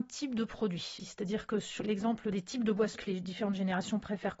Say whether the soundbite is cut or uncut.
cut